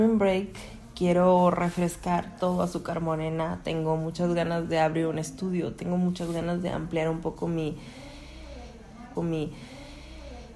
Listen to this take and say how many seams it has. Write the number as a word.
one